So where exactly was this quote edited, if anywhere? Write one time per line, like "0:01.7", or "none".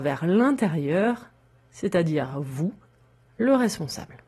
none